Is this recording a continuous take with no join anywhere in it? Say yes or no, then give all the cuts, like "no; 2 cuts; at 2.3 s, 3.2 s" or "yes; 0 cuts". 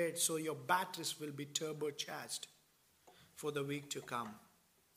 yes; 0 cuts